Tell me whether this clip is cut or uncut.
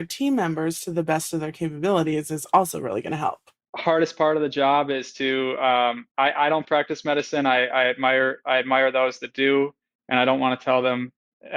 uncut